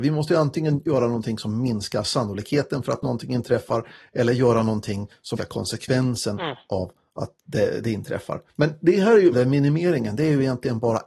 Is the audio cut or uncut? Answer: cut